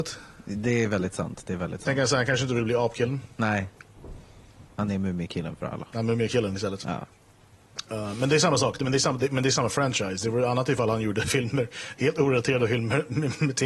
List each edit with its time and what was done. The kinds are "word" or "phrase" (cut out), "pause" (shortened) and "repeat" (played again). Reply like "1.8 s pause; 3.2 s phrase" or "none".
3.3 s pause